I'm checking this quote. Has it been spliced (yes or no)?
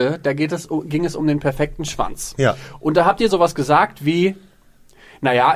no